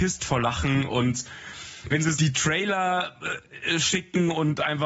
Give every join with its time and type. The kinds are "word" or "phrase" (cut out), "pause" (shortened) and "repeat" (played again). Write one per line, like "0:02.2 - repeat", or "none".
0:02.1 - word